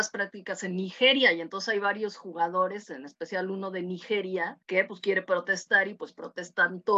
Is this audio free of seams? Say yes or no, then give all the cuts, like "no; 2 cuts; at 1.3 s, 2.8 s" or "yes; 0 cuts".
no; 1 cut; at 4.6 s